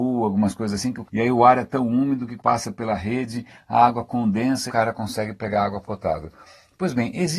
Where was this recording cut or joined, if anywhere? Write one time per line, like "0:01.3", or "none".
0:01.0
0:02.4
0:04.7